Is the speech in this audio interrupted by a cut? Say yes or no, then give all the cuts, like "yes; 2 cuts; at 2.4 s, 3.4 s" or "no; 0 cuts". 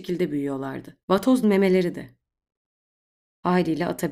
yes; 2 cuts; at 1.0 s, 1.4 s